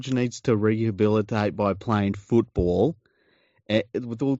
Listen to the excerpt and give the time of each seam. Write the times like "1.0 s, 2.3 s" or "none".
none